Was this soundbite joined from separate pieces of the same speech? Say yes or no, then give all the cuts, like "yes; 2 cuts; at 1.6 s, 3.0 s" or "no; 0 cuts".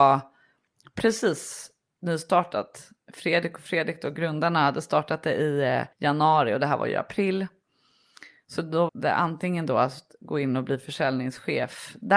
yes; 2 cuts; at 5.9 s, 8.9 s